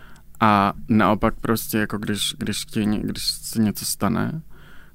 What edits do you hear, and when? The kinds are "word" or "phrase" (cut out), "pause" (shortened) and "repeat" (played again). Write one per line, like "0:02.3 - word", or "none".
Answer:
none